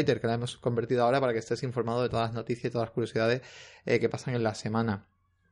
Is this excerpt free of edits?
yes; 0 cuts

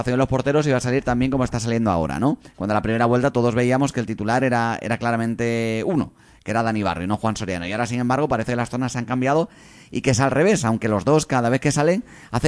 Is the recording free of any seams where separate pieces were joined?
yes; 0 cuts

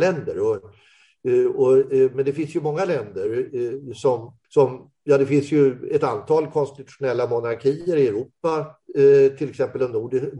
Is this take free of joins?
no; 1 cut; at 4.4 s

